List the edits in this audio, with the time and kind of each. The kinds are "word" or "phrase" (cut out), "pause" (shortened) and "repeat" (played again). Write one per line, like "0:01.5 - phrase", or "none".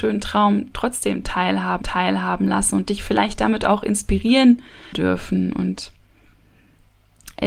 0:01.8 - repeat
0:04.9 - phrase